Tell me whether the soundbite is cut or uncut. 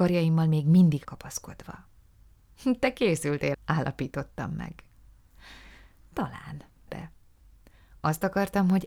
cut